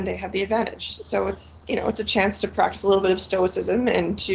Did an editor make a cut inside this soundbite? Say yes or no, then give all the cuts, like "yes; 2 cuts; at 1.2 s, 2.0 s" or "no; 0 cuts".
no; 0 cuts